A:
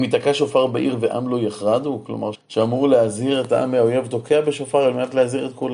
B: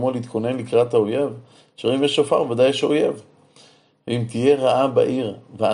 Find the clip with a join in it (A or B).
A